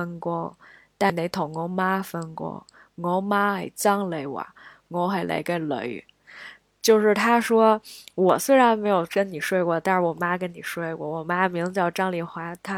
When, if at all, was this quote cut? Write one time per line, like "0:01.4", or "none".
none